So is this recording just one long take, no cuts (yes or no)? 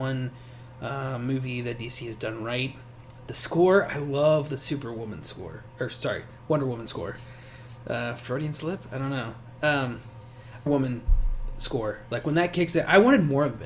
no